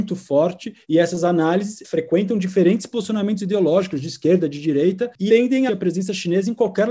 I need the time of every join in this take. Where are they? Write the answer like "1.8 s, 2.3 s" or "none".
1.8 s, 5.3 s, 5.7 s

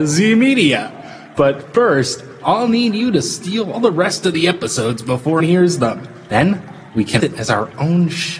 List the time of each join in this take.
3.7 s, 5.4 s, 7.2 s

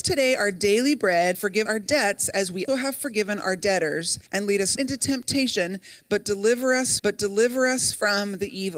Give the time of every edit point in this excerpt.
1.3 s, 1.7 s, 2.7 s, 4.3 s, 4.8 s, 7.0 s

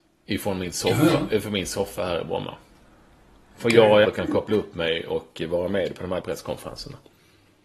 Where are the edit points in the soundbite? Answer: 4.0 s, 6.2 s

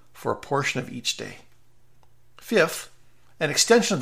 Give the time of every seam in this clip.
none

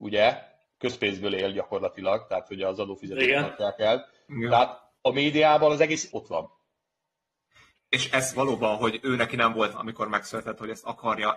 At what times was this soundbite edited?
5.0 s, 6.1 s, 8.3 s, 9.7 s

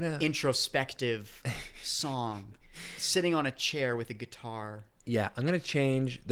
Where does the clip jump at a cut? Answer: none

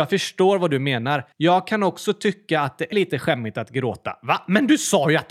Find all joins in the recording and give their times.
1.3 s, 2.9 s

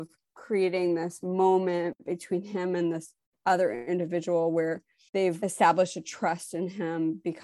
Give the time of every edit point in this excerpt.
none

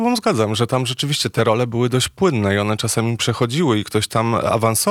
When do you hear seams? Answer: none

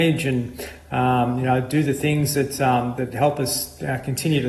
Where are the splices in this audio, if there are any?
3.0 s

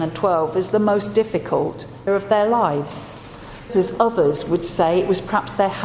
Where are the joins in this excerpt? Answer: 2.1 s, 3.7 s

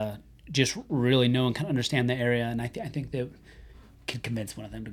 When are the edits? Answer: none

